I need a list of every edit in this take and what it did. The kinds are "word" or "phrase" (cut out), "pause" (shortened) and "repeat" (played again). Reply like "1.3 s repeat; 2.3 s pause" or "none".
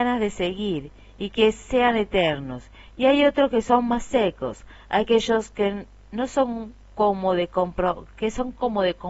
none